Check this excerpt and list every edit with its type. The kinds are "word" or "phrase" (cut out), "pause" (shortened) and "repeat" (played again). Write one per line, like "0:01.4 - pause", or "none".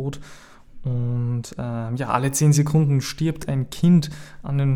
none